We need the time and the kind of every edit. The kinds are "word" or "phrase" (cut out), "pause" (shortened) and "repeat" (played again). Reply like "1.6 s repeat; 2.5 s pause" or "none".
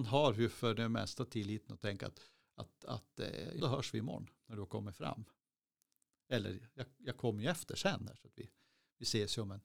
3.6 s word